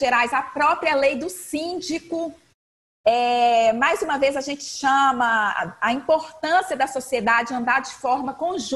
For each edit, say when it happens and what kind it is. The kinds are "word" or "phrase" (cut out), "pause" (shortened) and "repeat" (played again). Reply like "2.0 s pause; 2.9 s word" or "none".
none

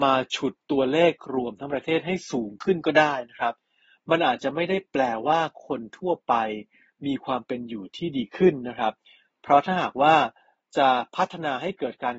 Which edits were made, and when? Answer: none

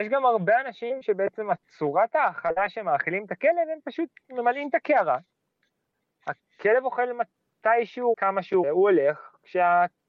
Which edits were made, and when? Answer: 8.1 s word; 8.6 s word

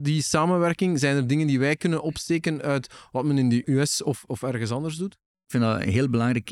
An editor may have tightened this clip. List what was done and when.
none

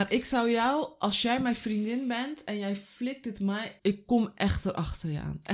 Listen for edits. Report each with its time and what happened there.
3.8 s word

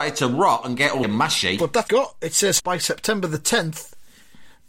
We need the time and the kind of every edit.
1.0 s word; 1.9 s phrase; 2.6 s word

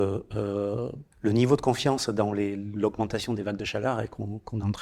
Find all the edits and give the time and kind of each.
1.1 s pause

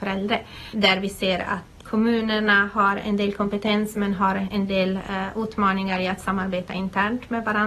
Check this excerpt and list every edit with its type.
none

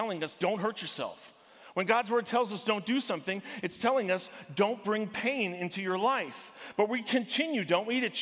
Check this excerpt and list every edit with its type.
none

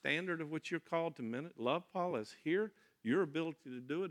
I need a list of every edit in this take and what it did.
none

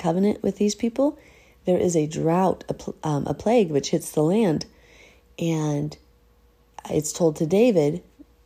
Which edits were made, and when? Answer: none

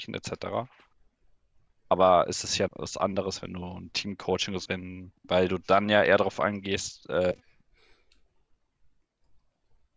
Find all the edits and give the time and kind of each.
2.7 s word; 3.9 s word; 4.7 s word; 5.2 s pause

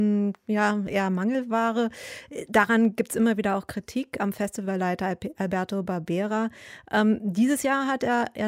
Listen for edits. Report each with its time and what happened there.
none

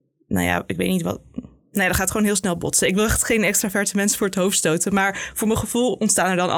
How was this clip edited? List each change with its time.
none

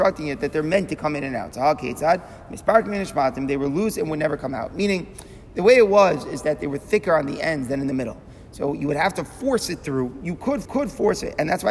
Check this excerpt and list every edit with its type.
10.6 s repeat

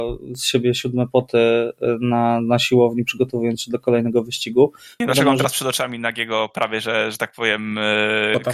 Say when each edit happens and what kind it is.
none

